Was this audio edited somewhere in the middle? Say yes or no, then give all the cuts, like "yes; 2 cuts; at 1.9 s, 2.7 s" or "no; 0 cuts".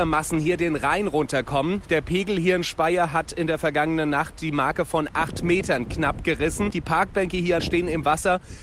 yes; 1 cut; at 7.6 s